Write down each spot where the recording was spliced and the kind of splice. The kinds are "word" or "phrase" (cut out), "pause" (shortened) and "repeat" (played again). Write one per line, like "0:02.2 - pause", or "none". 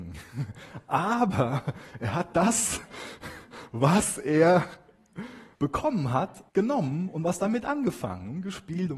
0:05.5 - pause
0:06.5 - pause